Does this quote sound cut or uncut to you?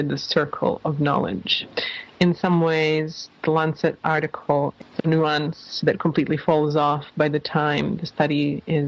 cut